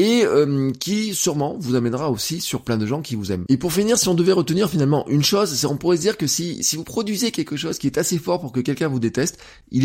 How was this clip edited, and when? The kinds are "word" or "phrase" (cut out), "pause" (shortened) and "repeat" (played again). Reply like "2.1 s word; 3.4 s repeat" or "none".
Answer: none